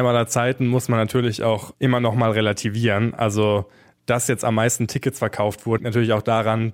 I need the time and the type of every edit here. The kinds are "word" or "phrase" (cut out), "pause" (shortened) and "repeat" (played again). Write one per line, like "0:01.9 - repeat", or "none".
0:05.8 - word